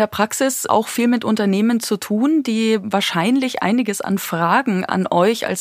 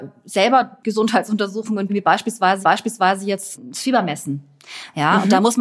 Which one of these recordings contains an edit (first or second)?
second